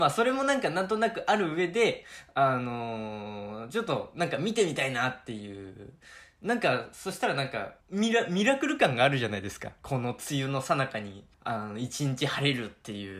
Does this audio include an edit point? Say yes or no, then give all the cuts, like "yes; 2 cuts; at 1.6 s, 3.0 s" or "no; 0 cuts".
yes; 2 cuts; at 7.8 s, 11.3 s